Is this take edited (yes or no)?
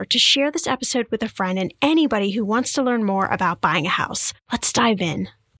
yes